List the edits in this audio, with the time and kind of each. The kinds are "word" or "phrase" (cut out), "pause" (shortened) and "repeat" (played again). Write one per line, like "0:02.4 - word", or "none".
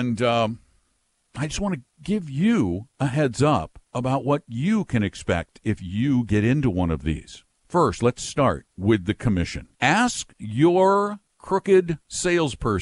0:03.9 - pause
0:07.5 - pause
0:08.7 - pause
0:09.7 - pause